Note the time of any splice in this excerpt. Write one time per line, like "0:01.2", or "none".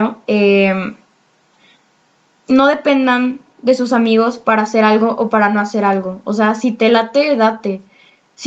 none